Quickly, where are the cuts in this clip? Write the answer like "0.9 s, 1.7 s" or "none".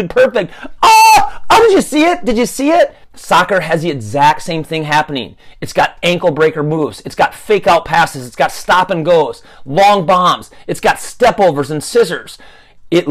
3.0 s